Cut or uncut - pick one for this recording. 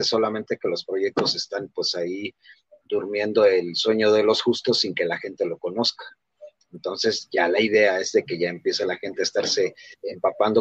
uncut